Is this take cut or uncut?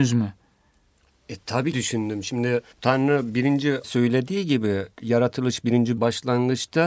cut